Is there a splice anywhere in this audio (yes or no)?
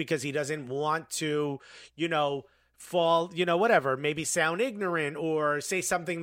no